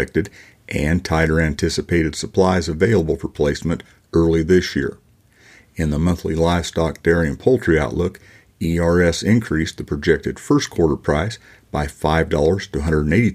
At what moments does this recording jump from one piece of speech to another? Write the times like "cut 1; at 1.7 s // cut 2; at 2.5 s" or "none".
none